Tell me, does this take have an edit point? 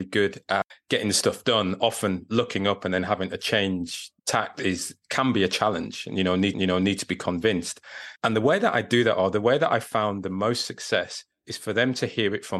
yes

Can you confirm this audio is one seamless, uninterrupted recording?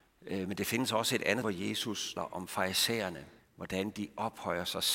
no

